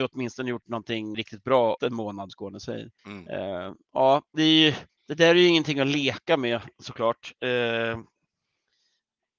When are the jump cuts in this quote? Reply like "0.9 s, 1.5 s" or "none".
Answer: 1.1 s, 1.8 s, 2.3 s, 3.0 s, 4.9 s